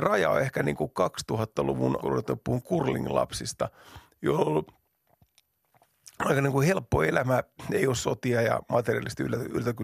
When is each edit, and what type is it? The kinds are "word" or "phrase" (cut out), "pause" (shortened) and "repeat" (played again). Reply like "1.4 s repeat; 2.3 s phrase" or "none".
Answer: 2.0 s word